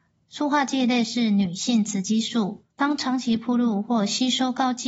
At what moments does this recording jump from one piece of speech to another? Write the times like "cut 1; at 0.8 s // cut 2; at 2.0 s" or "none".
cut 1; at 2.7 s